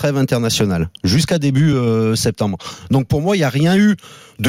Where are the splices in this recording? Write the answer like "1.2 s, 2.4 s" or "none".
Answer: none